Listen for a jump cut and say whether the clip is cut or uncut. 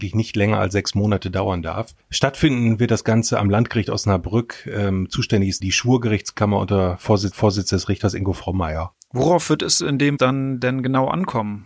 cut